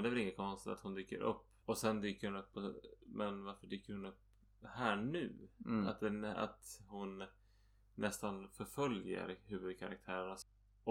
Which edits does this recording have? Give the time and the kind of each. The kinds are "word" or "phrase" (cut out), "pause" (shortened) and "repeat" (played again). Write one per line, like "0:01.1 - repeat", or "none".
0:01.6 - pause

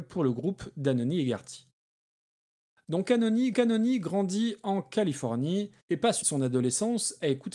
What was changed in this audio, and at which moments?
0:03.5 - repeat
0:05.8 - pause
0:06.2 - phrase

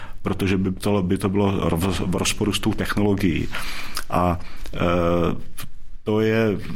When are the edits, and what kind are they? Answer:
none

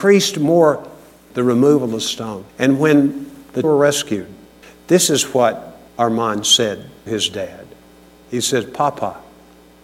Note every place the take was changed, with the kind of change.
0:01.3 - word
0:02.5 - pause
0:03.6 - word
0:04.6 - pause
0:05.9 - pause
0:07.1 - word

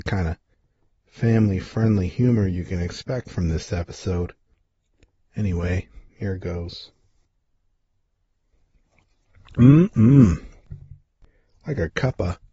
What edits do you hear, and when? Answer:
none

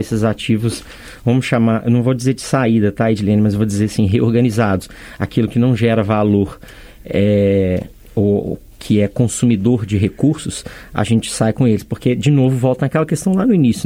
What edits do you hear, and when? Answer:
none

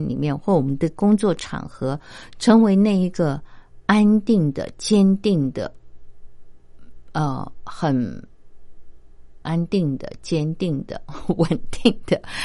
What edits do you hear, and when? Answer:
0:09.4 - word

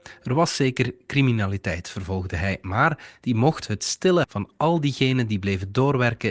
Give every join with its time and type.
0:04.2 - word

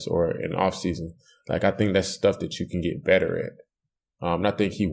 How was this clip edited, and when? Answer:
none

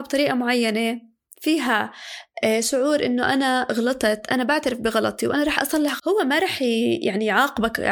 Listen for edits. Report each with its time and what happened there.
0:06.0 - word

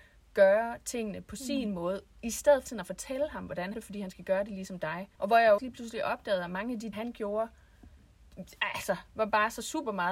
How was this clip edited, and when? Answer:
0:02.7 - word
0:03.7 - phrase
0:05.1 - pause
0:05.6 - word
0:06.9 - word

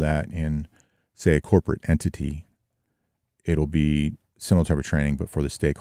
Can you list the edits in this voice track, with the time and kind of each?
none

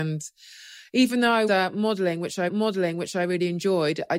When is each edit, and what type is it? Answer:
0:01.5 - word
0:02.5 - repeat

